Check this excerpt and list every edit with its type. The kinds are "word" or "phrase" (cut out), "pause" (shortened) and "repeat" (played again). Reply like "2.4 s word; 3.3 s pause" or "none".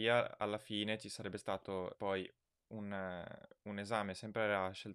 1.9 s word